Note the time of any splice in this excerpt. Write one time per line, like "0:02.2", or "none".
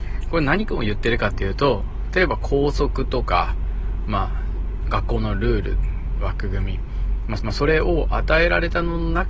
0:07.4